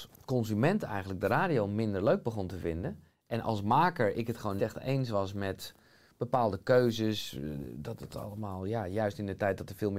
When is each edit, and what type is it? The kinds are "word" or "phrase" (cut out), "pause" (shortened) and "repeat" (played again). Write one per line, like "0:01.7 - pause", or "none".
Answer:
0:04.6 - word